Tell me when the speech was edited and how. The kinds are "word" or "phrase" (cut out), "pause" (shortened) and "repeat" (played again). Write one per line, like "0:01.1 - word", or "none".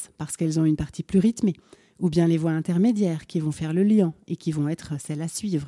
none